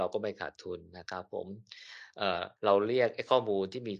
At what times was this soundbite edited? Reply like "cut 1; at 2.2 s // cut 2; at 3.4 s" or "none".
cut 1; at 2.6 s